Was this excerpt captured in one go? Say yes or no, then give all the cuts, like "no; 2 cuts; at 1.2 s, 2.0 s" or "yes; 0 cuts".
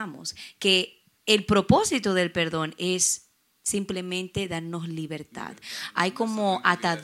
yes; 0 cuts